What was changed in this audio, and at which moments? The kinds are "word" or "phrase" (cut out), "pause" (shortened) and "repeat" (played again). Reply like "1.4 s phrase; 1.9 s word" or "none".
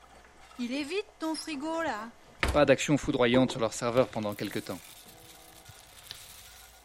none

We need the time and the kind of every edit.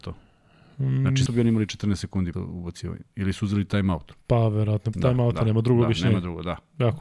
1.3 s word; 2.3 s word; 4.9 s word

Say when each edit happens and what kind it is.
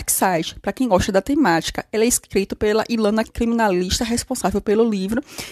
3.3 s word

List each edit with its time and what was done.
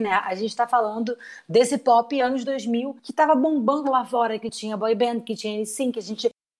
3.0 s pause

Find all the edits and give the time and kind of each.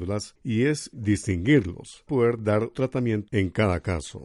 0.9 s word; 2.1 s word; 2.7 s word; 3.3 s word

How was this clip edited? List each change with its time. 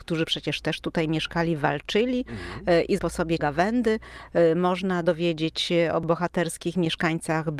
3.0 s word; 3.4 s word

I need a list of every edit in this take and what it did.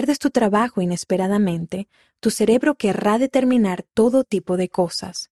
none

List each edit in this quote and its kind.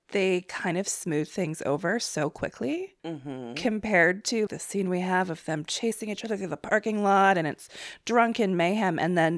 4.5 s word

